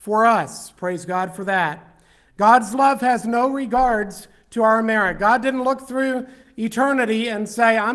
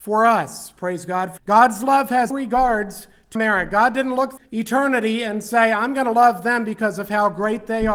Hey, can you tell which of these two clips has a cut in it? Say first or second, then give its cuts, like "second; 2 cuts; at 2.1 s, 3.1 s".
second; 4 cuts; at 1.4 s, 2.3 s, 3.4 s, 4.4 s